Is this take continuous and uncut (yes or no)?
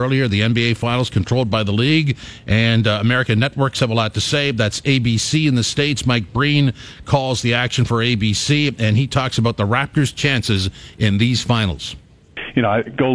yes